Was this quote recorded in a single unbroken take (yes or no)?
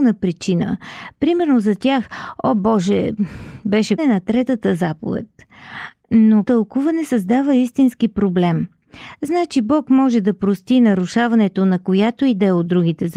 no